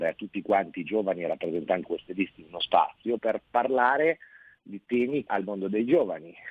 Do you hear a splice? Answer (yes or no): yes